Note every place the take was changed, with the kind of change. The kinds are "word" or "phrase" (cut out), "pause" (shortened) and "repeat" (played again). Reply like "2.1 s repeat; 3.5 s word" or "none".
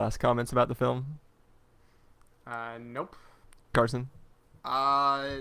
3.4 s pause

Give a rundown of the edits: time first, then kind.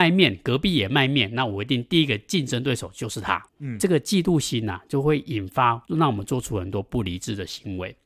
3.5 s pause; 5.9 s pause

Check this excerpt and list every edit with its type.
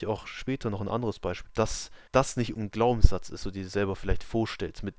1.5 s word; 2.1 s pause; 2.5 s word; 3.4 s word

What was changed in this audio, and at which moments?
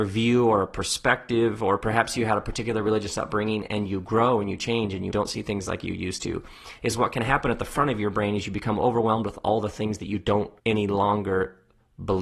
5.1 s phrase; 10.6 s pause

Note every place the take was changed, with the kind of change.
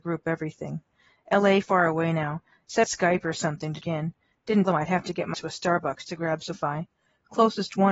1.6 s word; 2.8 s word; 3.8 s word; 4.6 s word; 5.3 s word; 6.5 s word

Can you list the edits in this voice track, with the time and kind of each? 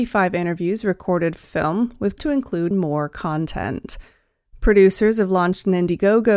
1.4 s word; 2.2 s word; 2.7 s word

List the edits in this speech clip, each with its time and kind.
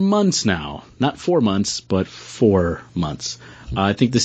2.9 s pause

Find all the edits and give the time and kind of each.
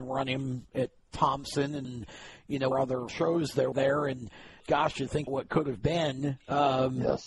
1.8 s word; 2.7 s word; 3.1 s word; 3.7 s word; 4.6 s word; 5.3 s word

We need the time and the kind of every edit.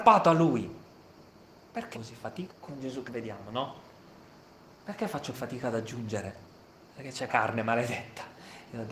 1.9 s word; 2.5 s word; 3.1 s word; 5.3 s word; 7.3 s word

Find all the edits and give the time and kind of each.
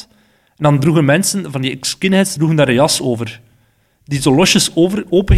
none

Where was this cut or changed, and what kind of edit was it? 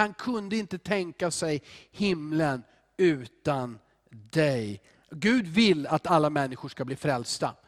none

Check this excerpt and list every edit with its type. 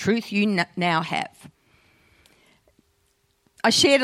none

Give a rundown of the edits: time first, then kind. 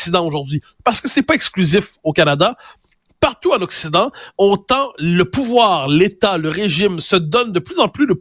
none

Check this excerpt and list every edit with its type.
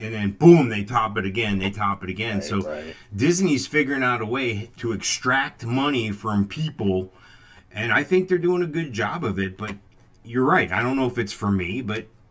none

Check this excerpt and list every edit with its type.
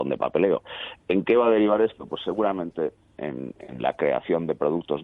1.0 s pause; 3.2 s word

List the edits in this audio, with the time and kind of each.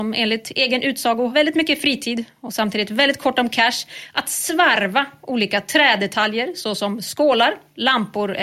1.3 s word

